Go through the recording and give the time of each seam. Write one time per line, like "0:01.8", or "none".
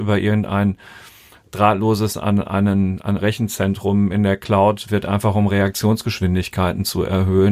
0:02.1
0:03.2
0:04.9